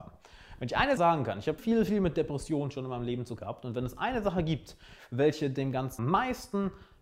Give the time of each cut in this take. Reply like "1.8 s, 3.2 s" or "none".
1.0 s, 1.6 s, 3.4 s, 6.0 s